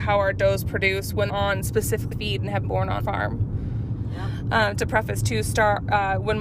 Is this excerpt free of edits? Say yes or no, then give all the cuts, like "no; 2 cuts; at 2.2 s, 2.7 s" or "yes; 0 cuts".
no; 5 cuts; at 1.3 s, 2.1 s, 2.6 s, 3.0 s, 4.7 s